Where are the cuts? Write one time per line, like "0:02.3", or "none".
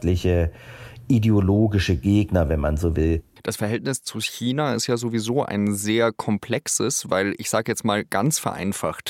0:03.4